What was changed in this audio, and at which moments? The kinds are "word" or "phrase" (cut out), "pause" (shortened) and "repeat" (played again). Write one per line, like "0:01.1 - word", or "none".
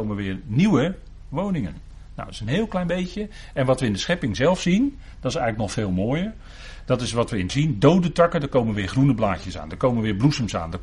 0:07.5 - word